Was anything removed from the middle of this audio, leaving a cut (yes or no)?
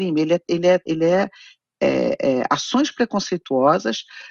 no